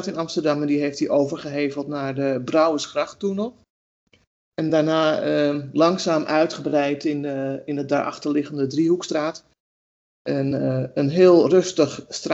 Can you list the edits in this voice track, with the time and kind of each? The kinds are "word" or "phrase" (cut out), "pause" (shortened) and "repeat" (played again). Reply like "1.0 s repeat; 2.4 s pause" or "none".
none